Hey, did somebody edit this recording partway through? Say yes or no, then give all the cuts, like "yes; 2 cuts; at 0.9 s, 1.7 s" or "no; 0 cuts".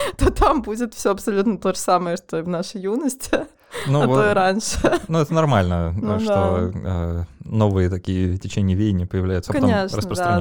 yes; 1 cut; at 9.5 s